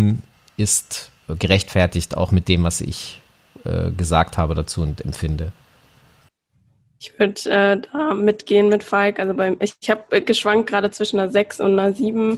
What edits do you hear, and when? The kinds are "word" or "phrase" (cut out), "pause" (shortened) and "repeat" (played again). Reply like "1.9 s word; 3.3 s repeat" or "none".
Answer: 1.2 s pause